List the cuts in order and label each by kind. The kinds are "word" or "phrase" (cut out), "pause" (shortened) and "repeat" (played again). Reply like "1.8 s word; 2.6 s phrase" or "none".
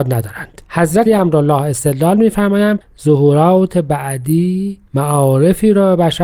1.1 s word; 2.8 s word; 4.9 s pause